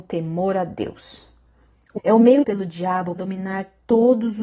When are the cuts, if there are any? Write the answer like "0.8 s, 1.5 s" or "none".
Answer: 2.0 s, 2.4 s, 3.2 s